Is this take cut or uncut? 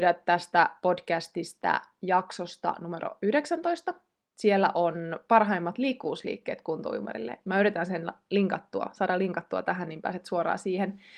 uncut